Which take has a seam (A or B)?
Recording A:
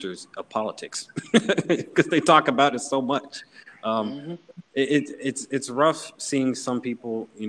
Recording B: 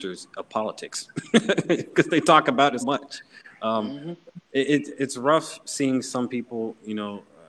B